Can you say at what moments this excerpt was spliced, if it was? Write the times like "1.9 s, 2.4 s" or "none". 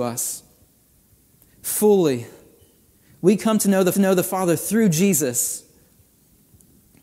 3.9 s